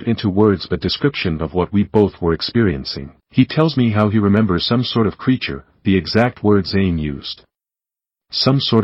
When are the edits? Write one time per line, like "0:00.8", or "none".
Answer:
0:03.2